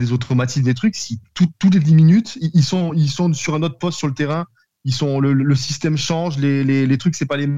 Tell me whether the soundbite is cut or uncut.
uncut